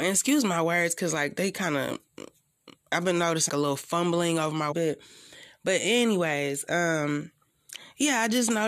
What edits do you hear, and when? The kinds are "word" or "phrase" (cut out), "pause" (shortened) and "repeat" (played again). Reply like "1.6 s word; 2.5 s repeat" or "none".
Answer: 2.8 s pause; 3.5 s word; 4.7 s phrase